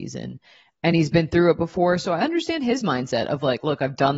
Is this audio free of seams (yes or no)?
yes